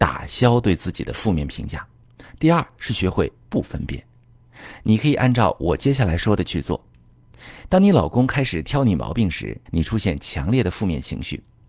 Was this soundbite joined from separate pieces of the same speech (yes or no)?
yes